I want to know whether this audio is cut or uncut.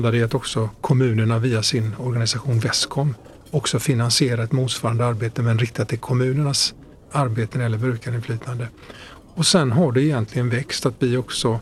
cut